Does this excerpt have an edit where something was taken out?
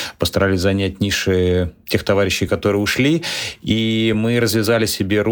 no; 0 cuts

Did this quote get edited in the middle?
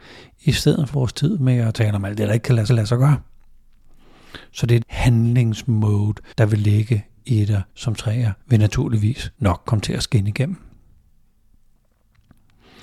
yes; 8 cuts; at 0.9 s, 2.7 s, 4.8 s, 6.3 s, 7.2 s, 7.7 s, 8.4 s, 9.3 s

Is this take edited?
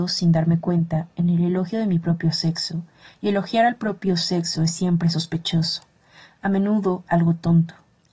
no; 0 cuts

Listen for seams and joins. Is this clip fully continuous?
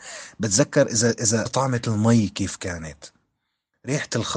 no; 1 cut; at 1.5 s

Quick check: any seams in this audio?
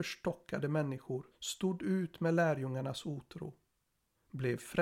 yes; 1 cut; at 1.3 s

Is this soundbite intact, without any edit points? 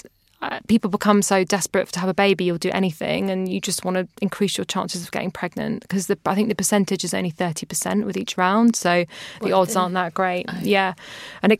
yes; 0 cuts

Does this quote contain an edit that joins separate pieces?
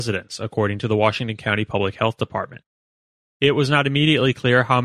no; 0 cuts

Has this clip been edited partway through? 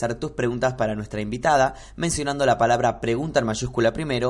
no; 0 cuts

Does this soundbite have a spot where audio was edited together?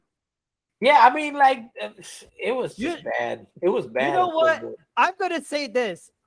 yes; 1 cut; at 2.3 s

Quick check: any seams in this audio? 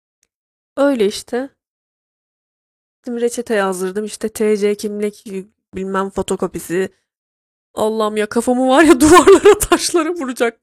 no; 0 cuts

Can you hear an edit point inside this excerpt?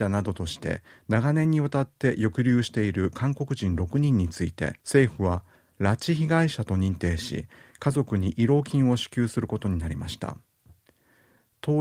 yes; 1 cut; at 4.8 s

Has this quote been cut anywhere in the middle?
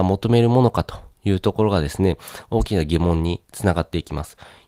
yes; 1 cut; at 3.4 s

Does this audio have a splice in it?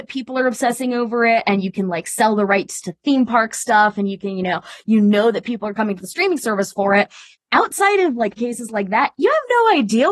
yes; 2 cuts; at 7.4 s, 8.4 s

